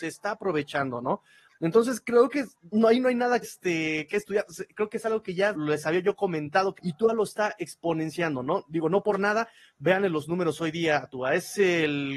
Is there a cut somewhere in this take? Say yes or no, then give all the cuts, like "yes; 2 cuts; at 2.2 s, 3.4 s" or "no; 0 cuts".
yes; 4 cuts; at 2.7 s, 3.4 s, 5.5 s, 6.8 s